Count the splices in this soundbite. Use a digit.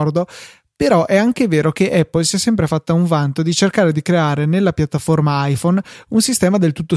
0